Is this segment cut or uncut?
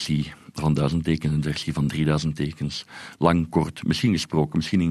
uncut